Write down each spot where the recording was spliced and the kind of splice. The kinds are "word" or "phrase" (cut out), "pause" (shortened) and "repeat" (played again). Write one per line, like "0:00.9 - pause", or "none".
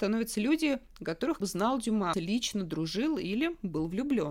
0:01.4 - word
0:02.1 - word